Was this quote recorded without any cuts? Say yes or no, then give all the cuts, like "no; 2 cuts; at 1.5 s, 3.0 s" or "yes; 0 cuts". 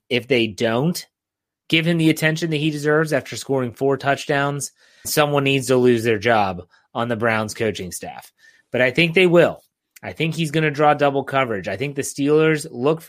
no; 1 cut; at 5.0 s